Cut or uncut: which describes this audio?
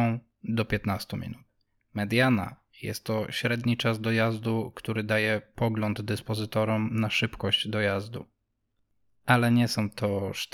uncut